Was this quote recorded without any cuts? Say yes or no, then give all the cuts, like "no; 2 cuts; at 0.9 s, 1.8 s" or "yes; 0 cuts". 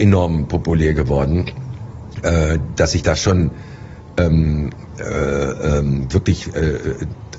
yes; 0 cuts